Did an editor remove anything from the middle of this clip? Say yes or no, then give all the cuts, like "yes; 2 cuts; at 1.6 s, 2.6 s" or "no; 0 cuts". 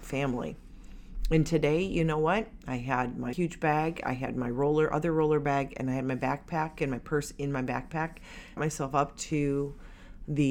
yes; 2 cuts; at 3.3 s, 8.6 s